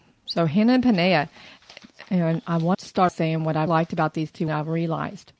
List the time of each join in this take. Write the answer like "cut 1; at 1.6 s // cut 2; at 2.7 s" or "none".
cut 1; at 2.7 s // cut 2; at 3.1 s // cut 3; at 3.7 s // cut 4; at 4.5 s